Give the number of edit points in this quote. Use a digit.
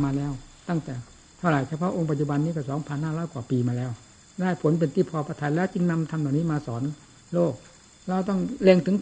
0